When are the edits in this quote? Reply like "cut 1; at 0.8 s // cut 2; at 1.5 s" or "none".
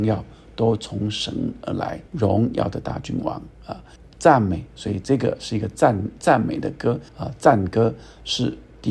cut 1; at 2.1 s // cut 2; at 4.0 s // cut 3; at 7.1 s